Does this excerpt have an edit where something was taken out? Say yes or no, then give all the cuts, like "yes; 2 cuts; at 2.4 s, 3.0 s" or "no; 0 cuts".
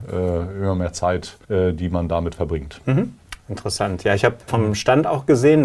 yes; 2 cuts; at 1.4 s, 4.5 s